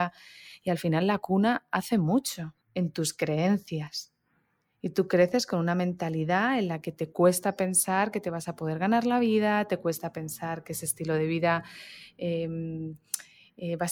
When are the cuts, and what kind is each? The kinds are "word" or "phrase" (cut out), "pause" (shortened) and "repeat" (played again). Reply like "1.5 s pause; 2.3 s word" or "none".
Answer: 2.6 s pause

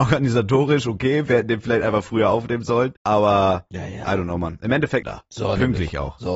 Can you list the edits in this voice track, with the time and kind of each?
3.0 s pause; 5.0 s phrase

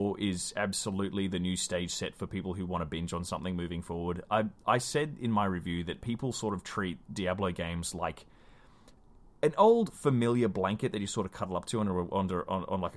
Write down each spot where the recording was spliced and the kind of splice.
none

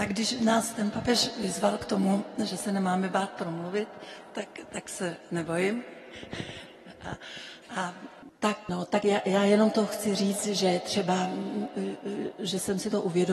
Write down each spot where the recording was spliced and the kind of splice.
none

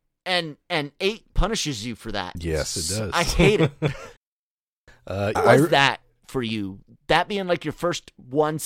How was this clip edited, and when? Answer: 4.2 s pause; 5.4 s word

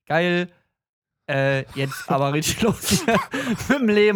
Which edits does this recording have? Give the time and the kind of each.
2.1 s word

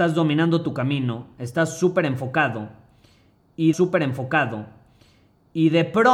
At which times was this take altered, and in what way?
3.7 s repeat

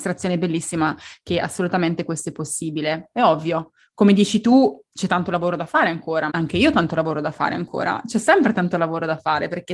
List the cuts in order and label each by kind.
6.3 s word

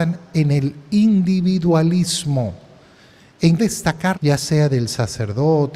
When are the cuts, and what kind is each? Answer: 3.6 s word; 4.1 s phrase

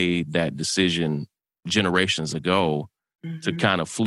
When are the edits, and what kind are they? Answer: none

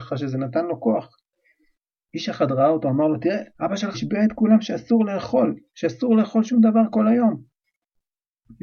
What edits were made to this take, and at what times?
3.5 s pause; 3.9 s phrase; 5.7 s pause

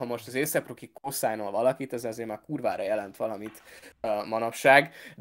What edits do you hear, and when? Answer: none

